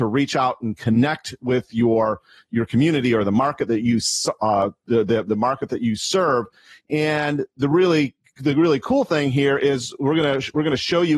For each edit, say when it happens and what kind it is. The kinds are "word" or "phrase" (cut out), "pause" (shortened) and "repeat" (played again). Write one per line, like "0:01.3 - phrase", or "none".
none